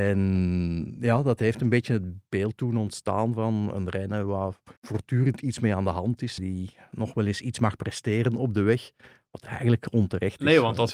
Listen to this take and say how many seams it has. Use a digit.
2